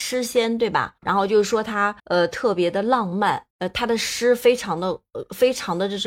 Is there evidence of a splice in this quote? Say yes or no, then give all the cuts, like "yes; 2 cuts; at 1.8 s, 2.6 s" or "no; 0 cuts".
yes; 3 cuts; at 1.0 s, 2.0 s, 3.5 s